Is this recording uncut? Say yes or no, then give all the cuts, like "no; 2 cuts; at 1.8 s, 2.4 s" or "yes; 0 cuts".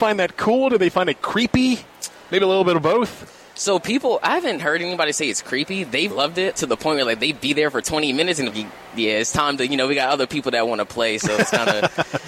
no; 3 cuts; at 6.1 s, 6.5 s, 8.5 s